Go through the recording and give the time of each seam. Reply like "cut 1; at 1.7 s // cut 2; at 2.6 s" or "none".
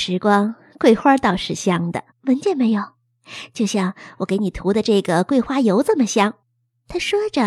cut 1; at 2.1 s // cut 2; at 6.4 s